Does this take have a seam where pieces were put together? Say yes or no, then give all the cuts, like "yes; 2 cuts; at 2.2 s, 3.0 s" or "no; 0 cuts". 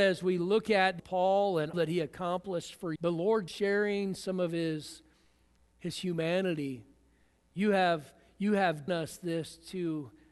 yes; 5 cuts; at 1.0 s, 1.7 s, 3.0 s, 3.5 s, 8.9 s